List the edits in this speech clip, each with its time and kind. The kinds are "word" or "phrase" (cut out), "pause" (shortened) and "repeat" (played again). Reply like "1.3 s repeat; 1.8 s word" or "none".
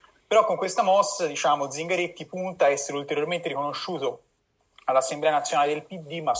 none